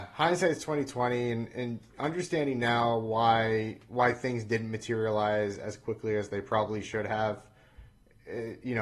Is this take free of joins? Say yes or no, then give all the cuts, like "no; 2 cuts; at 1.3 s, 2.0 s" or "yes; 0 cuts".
yes; 0 cuts